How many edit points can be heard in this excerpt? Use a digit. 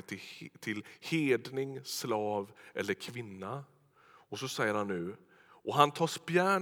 0